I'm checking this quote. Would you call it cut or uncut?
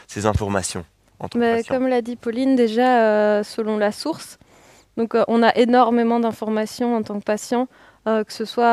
uncut